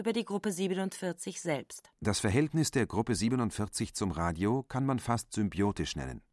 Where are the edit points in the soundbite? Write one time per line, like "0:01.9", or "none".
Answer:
0:01.9